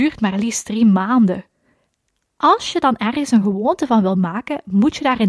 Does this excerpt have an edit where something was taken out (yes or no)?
no